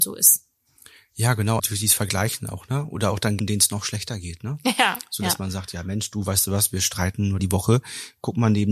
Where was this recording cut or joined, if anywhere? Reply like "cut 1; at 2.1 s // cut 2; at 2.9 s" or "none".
cut 1; at 1.6 s // cut 2; at 3.4 s // cut 3; at 7.4 s